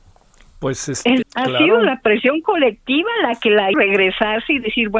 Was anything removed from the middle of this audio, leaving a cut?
yes; 2 cuts; at 1.2 s, 3.7 s

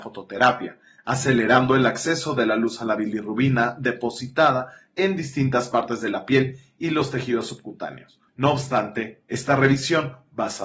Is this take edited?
yes; 1 cut; at 8.3 s

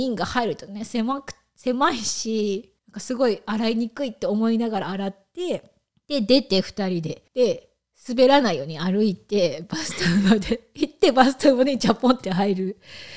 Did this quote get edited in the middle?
yes; 3 cuts; at 2.8 s, 5.9 s, 7.3 s

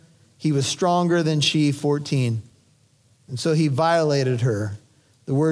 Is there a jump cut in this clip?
no; 0 cuts

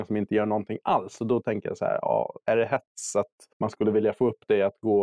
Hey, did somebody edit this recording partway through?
yes; 1 cut; at 3.5 s

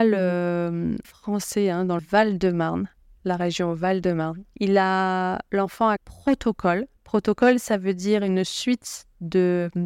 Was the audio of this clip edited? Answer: yes; 5 cuts; at 1.0 s, 2.0 s, 4.5 s, 6.0 s, 7.0 s

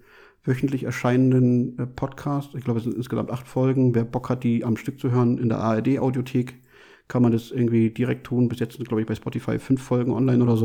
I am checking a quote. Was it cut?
no; 0 cuts

